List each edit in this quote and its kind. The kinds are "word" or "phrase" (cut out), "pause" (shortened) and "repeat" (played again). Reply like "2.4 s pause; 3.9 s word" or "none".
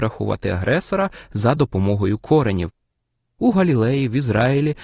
none